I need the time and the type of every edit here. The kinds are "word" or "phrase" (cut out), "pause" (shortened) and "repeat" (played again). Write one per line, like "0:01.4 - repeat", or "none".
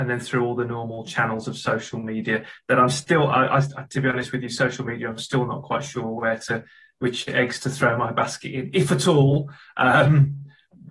none